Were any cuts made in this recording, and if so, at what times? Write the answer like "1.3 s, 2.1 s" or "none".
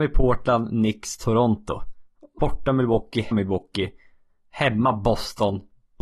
2.4 s, 3.3 s